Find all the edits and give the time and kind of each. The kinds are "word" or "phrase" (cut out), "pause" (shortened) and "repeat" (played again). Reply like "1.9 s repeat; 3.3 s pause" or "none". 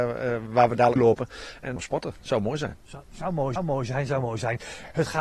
1.0 s word; 1.8 s phrase; 3.6 s repeat